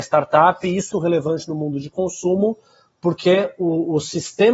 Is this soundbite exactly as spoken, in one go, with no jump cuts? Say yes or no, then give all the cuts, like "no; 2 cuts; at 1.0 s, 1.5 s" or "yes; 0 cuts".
no; 1 cut; at 0.9 s